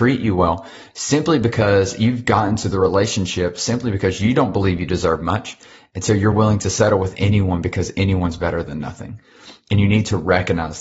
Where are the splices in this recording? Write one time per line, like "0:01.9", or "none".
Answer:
none